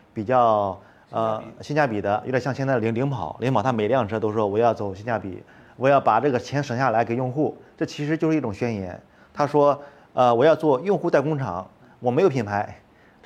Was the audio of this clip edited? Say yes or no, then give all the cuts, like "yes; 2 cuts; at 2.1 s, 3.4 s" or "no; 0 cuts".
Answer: no; 0 cuts